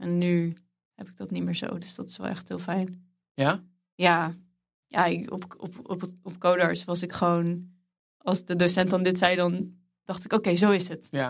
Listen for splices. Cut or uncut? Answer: uncut